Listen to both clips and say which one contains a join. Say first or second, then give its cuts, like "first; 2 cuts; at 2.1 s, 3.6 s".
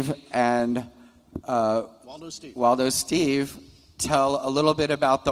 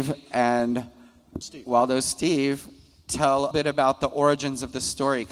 second; 2 cuts; at 1.4 s, 3.5 s